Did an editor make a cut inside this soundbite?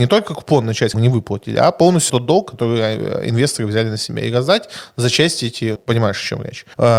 yes; 3 cuts; at 0.9 s, 2.1 s, 5.8 s

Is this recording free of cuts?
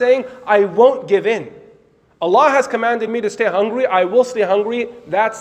yes; 0 cuts

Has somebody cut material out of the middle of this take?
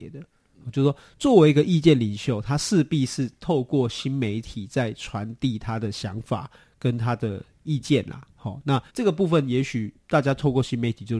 yes; 2 cuts; at 8.9 s, 10.0 s

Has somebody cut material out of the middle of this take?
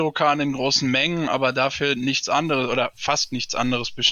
no; 0 cuts

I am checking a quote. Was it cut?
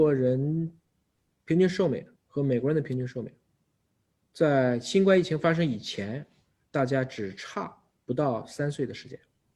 yes; 1 cut; at 2.2 s

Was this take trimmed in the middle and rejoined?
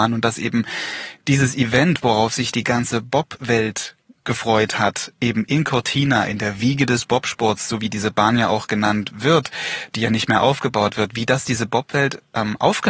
no; 0 cuts

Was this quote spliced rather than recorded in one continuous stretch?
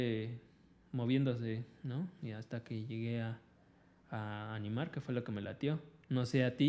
no; 0 cuts

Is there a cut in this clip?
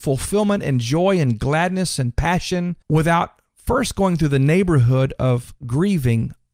yes; 1 cut; at 2.8 s

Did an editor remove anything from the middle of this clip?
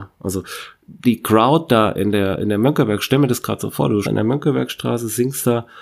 yes; 2 cuts; at 1.0 s, 4.0 s

